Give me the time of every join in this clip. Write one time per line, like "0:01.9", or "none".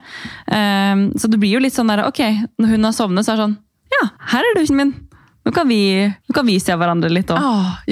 0:04.2
0:04.7
0:06.2